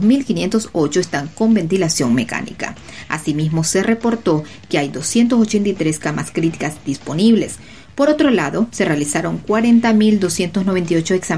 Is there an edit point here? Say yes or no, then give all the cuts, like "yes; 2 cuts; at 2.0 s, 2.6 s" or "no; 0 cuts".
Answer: no; 0 cuts